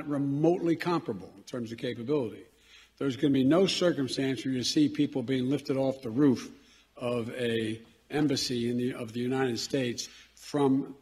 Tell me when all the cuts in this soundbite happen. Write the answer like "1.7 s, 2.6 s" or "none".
none